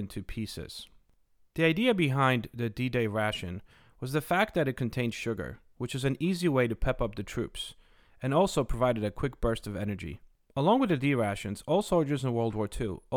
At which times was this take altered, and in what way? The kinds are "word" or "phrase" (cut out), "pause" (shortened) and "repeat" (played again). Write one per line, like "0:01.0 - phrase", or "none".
none